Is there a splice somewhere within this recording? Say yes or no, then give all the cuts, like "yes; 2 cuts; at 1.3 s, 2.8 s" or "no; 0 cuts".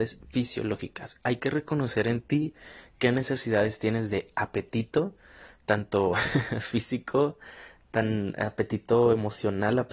no; 0 cuts